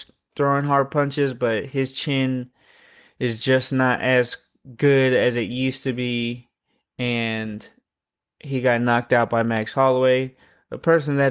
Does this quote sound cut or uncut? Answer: uncut